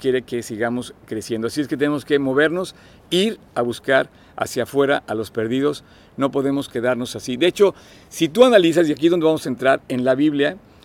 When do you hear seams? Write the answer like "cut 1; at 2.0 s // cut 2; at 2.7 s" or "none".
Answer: none